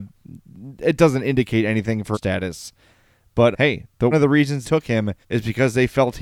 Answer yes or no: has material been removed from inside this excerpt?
yes